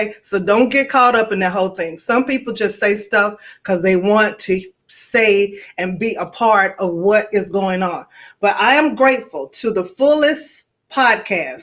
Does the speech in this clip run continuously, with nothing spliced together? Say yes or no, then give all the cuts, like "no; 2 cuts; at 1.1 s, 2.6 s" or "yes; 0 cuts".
yes; 0 cuts